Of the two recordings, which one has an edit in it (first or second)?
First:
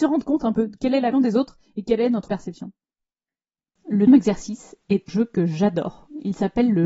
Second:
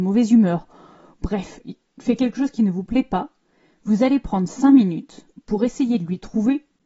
first